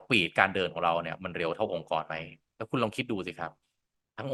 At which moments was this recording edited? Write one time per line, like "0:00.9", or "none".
none